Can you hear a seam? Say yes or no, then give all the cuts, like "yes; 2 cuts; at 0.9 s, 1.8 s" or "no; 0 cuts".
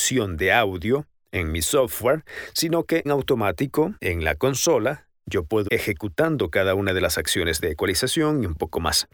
yes; 3 cuts; at 3.0 s, 4.0 s, 5.7 s